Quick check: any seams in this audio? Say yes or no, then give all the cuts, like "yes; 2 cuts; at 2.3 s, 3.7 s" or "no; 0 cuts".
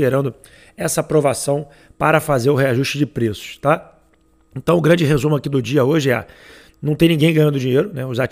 no; 0 cuts